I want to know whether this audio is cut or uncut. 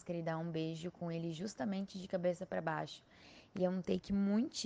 uncut